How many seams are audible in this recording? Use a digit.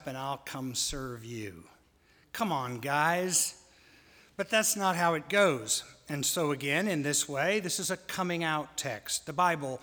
0